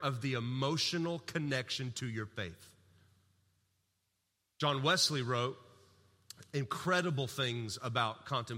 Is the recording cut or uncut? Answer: uncut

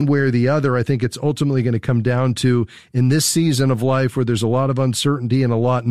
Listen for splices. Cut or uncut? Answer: uncut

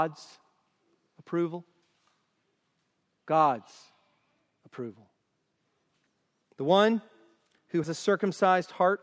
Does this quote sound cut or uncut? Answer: cut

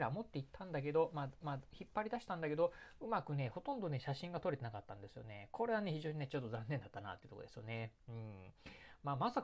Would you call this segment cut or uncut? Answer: cut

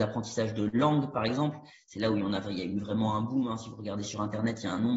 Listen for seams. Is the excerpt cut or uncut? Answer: uncut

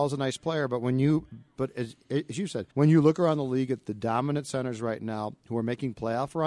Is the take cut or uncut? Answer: cut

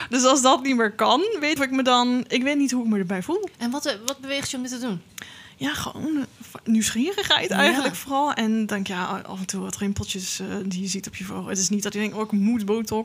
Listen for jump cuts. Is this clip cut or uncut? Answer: cut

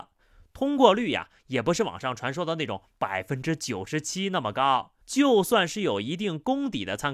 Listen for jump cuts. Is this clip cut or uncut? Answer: cut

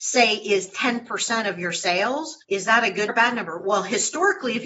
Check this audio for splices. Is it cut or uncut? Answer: cut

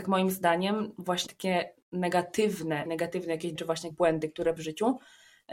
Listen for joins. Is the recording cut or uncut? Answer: cut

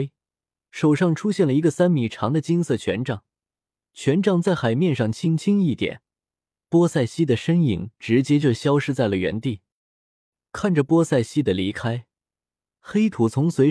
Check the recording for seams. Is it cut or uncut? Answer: uncut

